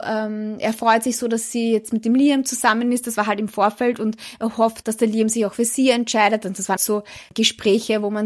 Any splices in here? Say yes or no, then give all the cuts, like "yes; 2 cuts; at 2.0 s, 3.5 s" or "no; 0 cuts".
yes; 2 cuts; at 4.8 s, 6.8 s